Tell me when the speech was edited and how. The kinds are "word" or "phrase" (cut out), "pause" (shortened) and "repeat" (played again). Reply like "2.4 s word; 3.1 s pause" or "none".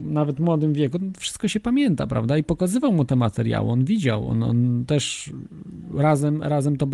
none